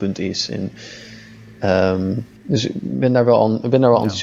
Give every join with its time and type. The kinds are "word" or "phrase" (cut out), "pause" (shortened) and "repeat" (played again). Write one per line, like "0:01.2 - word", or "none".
0:02.4 - pause